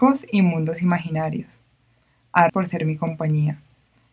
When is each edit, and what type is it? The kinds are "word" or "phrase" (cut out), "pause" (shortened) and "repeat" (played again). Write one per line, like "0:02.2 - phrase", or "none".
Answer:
0:02.5 - word